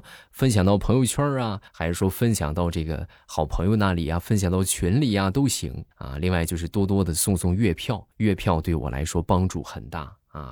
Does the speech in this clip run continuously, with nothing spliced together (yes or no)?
no